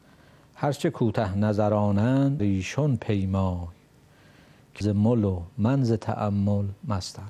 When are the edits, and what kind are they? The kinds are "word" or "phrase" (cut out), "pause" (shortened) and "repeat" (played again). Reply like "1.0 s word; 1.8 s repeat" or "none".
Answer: 2.4 s word; 4.8 s phrase